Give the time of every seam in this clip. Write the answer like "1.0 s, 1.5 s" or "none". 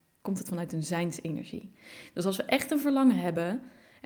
none